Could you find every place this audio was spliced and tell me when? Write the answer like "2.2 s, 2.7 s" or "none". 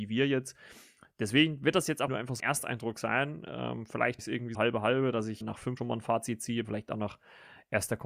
2.1 s, 2.4 s, 4.2 s, 4.5 s, 5.4 s, 5.8 s, 6.6 s